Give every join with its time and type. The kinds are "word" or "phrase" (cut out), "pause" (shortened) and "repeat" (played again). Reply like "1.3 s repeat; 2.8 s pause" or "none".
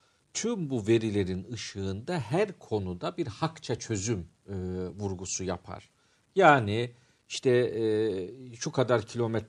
none